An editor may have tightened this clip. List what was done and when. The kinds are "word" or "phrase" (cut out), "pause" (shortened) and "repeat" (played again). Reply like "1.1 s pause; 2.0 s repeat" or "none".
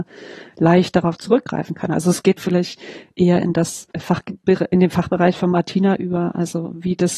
2.4 s word; 3.9 s pause

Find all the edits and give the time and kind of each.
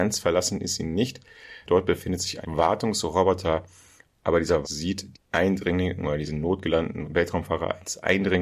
1.7 s word; 2.4 s word; 4.6 s word; 5.1 s word

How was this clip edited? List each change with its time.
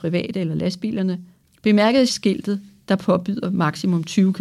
2.1 s word

